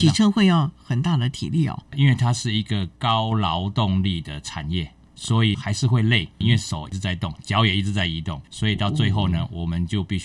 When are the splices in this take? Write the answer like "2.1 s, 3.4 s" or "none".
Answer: 8.4 s